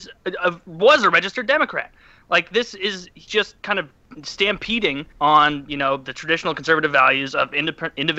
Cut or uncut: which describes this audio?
cut